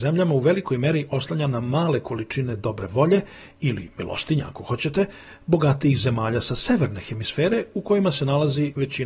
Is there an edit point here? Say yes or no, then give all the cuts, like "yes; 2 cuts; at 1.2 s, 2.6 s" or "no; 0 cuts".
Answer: no; 0 cuts